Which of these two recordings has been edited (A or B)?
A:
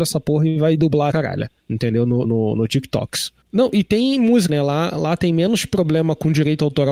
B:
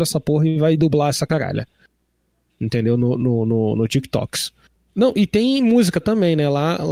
A